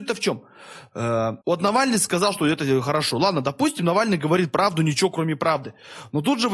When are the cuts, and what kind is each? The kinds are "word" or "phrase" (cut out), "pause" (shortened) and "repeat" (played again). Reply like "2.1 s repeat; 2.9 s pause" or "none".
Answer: 1.4 s pause